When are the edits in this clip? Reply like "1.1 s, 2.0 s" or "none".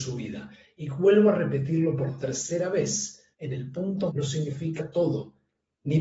3.3 s, 4.1 s, 4.8 s